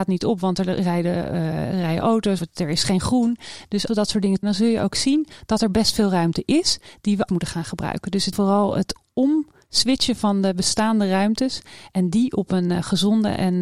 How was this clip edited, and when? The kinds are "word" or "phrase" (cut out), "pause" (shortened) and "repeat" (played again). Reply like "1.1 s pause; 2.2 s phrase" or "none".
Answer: 2.4 s word; 3.9 s word; 4.4 s word; 7.3 s word; 8.3 s word